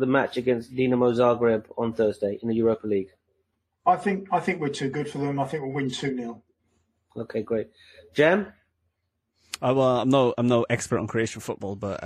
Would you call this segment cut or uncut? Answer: uncut